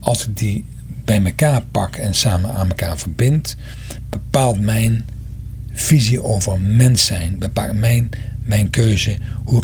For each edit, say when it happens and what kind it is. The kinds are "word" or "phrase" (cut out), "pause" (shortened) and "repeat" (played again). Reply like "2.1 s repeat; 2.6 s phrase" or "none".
none